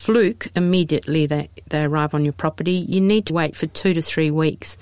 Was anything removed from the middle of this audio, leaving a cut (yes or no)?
yes